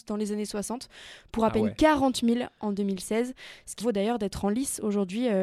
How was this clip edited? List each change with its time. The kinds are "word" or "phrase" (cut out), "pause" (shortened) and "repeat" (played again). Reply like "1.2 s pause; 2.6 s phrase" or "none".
3.8 s word